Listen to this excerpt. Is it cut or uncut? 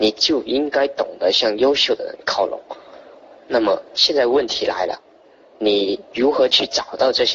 uncut